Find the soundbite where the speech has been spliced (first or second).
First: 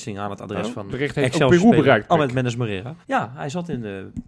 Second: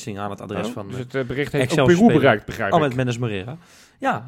first